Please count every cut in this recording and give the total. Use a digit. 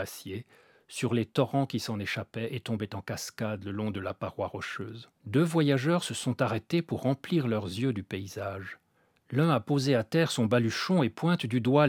2